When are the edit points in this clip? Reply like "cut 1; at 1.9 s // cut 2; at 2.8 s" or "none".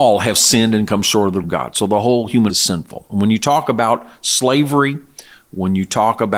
cut 1; at 1.4 s // cut 2; at 2.5 s